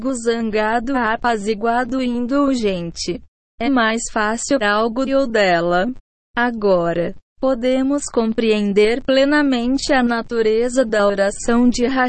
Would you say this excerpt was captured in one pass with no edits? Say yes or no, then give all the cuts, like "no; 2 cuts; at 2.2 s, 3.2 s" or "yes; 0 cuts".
no; 4 cuts; at 0.9 s, 3.6 s, 4.6 s, 5.1 s